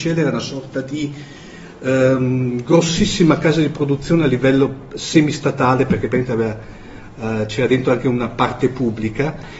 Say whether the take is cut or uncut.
uncut